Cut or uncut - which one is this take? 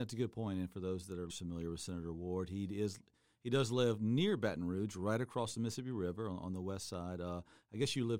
cut